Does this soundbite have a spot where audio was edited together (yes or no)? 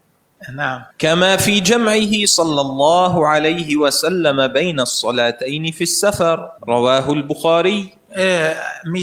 yes